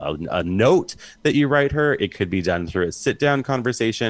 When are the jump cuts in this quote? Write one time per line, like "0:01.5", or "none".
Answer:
none